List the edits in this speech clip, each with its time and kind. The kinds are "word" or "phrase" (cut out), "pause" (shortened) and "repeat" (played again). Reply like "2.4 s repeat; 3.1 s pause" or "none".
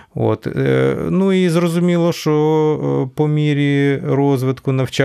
none